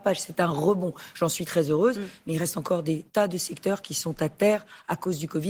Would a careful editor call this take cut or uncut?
cut